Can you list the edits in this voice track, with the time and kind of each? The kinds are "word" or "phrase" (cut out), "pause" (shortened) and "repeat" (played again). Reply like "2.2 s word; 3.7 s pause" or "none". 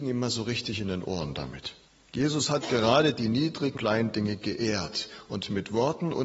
1.9 s pause; 3.7 s word